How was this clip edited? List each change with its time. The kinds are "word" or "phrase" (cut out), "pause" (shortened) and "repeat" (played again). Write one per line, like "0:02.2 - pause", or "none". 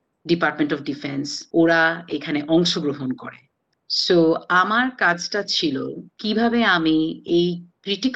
0:01.5 - pause
0:06.1 - pause